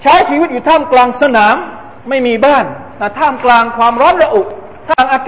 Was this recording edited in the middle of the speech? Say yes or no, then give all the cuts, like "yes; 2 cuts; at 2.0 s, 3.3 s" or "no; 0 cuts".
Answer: yes; 1 cut; at 2.0 s